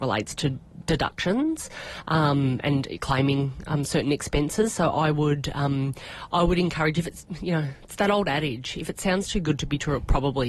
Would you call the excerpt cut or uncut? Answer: uncut